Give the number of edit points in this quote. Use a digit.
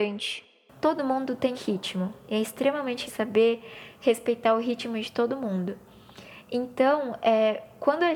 2